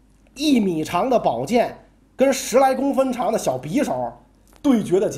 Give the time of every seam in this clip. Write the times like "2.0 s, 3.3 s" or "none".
none